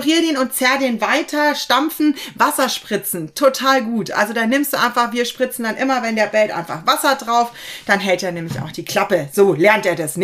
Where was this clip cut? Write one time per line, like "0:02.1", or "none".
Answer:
none